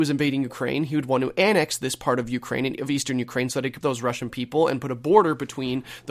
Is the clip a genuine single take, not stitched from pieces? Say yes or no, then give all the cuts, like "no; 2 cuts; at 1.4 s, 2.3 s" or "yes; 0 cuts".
no; 1 cut; at 3.8 s